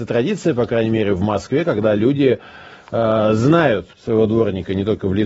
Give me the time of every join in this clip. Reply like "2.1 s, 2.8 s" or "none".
3.9 s